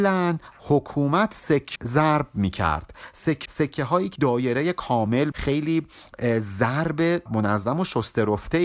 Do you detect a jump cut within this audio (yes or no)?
yes